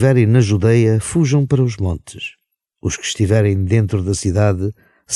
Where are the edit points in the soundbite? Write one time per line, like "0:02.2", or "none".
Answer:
none